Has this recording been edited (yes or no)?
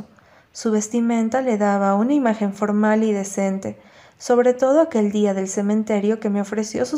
no